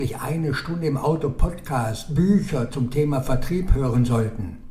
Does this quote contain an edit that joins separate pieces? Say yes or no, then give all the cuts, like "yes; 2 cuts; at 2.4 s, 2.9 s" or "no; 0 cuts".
no; 0 cuts